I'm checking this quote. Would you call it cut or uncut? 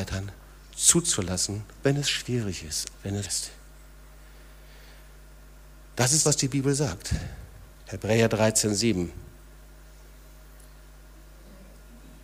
cut